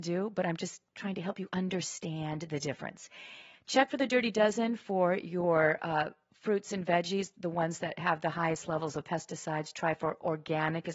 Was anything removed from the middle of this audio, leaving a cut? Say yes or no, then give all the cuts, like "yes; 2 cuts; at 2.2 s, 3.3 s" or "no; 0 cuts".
no; 0 cuts